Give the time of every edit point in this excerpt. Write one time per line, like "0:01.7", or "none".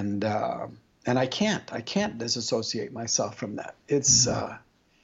none